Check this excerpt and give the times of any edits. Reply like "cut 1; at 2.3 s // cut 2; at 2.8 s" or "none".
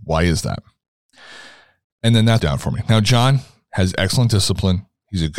cut 1; at 2.4 s